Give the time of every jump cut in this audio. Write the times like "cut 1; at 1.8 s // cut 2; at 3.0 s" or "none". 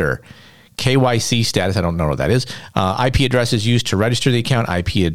none

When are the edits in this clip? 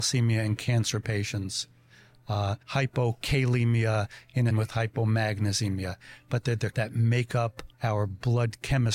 cut 1; at 2.6 s // cut 2; at 4.5 s // cut 3; at 6.7 s // cut 4; at 7.7 s

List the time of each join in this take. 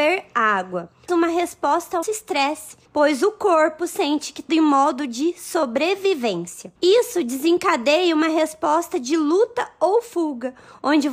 cut 1; at 1.1 s // cut 2; at 2.0 s // cut 3; at 2.8 s // cut 4; at 4.5 s // cut 5; at 6.8 s

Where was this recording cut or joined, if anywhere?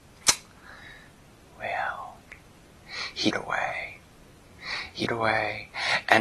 cut 1; at 3.3 s // cut 2; at 5.1 s

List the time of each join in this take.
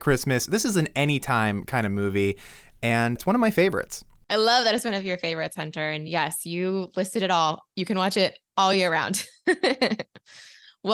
none

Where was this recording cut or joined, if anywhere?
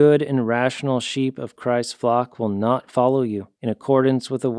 cut 1; at 3.5 s

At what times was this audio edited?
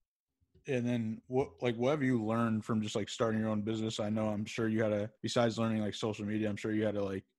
cut 1; at 5.2 s

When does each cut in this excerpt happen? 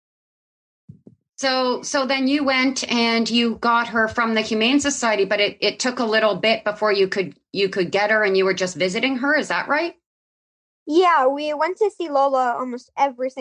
none

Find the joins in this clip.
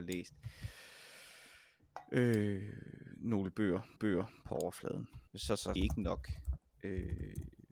cut 1; at 4.0 s // cut 2; at 5.3 s // cut 3; at 5.8 s

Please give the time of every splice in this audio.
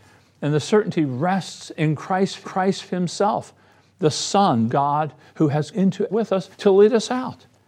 cut 1; at 2.4 s // cut 2; at 4.7 s // cut 3; at 5.7 s // cut 4; at 6.1 s // cut 5; at 6.5 s

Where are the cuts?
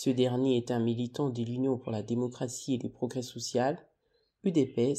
none

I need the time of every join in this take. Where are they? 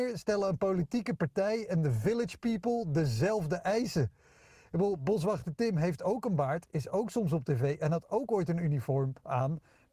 none

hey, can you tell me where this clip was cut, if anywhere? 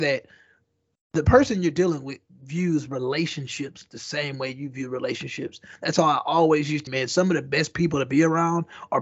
cut 1; at 6.9 s

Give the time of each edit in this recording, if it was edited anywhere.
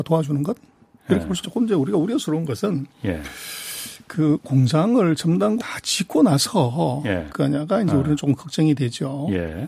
cut 1; at 1.4 s // cut 2; at 5.6 s // cut 3; at 7.3 s

